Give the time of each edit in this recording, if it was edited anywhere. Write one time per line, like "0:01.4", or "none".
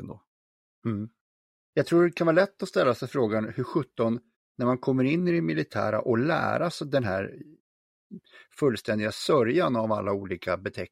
none